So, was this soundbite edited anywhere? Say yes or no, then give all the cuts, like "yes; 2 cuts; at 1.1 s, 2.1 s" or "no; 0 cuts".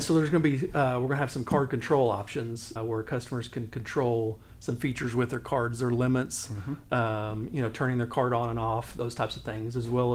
yes; 1 cut; at 2.8 s